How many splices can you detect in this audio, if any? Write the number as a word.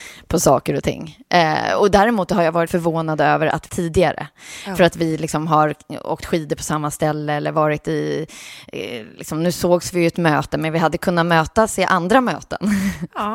two